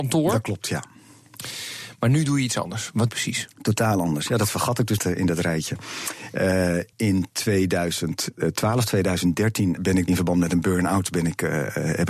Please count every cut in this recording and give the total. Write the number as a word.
five